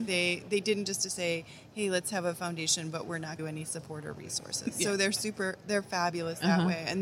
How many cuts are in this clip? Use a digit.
1